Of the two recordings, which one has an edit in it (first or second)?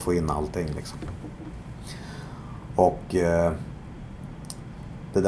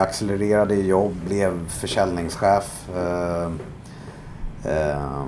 second